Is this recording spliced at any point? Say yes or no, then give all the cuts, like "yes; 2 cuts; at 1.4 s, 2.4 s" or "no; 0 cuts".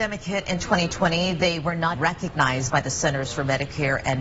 yes; 1 cut; at 1.9 s